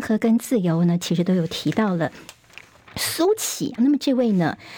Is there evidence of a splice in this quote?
yes; 1 cut; at 3.8 s

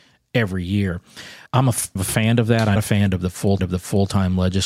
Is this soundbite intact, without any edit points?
no; 4 cuts; at 1.5 s, 2.0 s, 2.8 s, 3.6 s

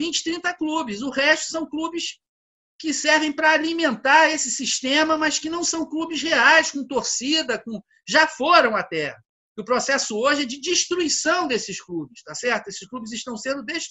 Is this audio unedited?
yes; 0 cuts

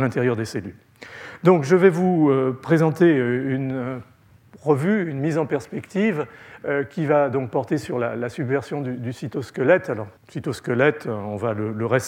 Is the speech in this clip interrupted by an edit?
yes; 1 cut; at 10.2 s

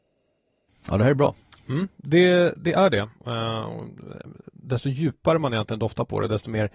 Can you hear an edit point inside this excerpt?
no; 0 cuts

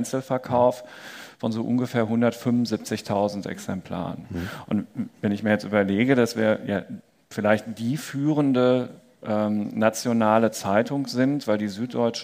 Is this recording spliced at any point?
yes; 1 cut; at 7.2 s

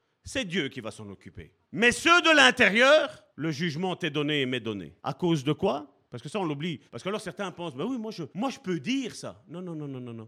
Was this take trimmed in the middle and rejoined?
yes; 6 cuts; at 1.6 s, 3.3 s, 5.0 s, 6.1 s, 6.9 s, 8.3 s

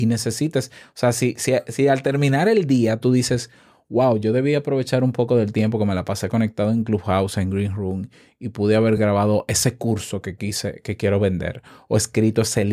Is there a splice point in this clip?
no; 0 cuts

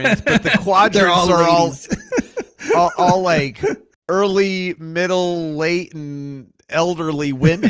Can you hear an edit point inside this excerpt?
no; 0 cuts

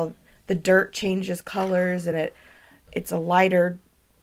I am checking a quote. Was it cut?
no; 0 cuts

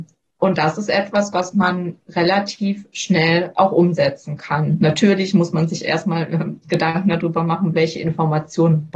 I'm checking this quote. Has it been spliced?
no; 0 cuts

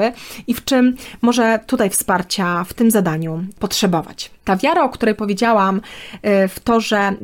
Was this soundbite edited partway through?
no; 0 cuts

